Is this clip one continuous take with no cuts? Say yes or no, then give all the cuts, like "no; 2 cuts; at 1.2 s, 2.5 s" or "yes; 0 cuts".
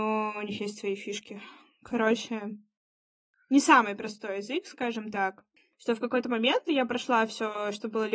yes; 0 cuts